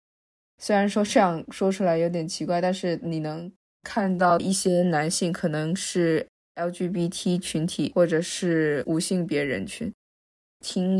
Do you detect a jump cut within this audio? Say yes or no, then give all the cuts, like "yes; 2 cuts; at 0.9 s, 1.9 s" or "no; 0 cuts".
no; 0 cuts